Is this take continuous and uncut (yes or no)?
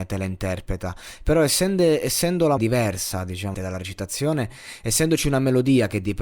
no